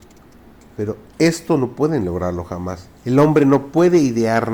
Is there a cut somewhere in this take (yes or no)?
yes